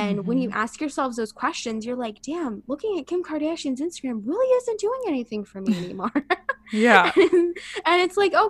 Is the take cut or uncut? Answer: uncut